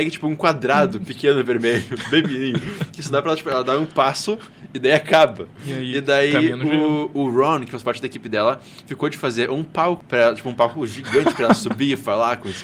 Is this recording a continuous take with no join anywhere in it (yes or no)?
yes